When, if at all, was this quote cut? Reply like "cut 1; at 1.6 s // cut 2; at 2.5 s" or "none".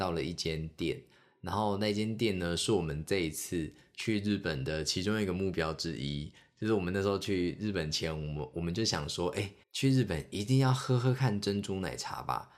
cut 1; at 9.6 s

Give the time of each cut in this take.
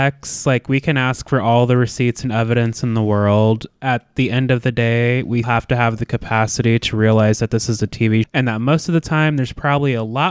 cut 1; at 5.4 s // cut 2; at 8.2 s

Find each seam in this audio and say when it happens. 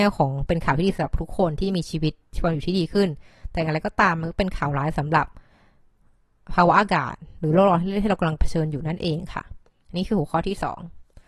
none

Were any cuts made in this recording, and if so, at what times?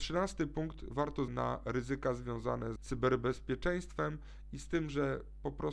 cut 1; at 1.3 s // cut 2; at 2.8 s

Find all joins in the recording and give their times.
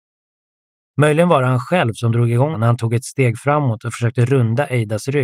cut 1; at 2.5 s

